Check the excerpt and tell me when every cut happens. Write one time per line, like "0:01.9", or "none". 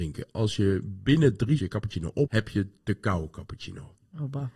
0:01.6
0:02.3